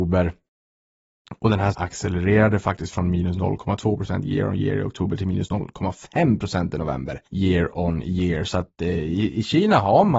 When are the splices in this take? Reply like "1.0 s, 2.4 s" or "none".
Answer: 1.7 s, 7.3 s